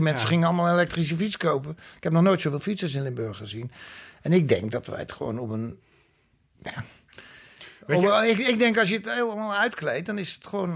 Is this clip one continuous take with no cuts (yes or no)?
yes